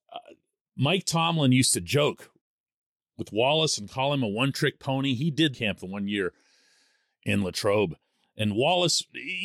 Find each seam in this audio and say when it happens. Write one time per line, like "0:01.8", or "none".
0:05.5